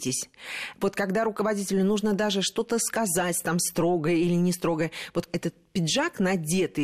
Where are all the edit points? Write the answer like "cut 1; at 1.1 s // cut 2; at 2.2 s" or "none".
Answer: none

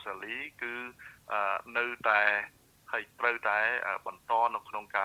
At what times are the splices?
none

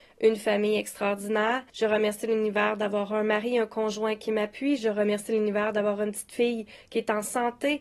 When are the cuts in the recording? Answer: cut 1; at 1.7 s

